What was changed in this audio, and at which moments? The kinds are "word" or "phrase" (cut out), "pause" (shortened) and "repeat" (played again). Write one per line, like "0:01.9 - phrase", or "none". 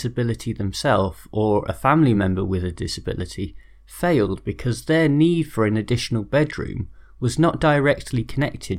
none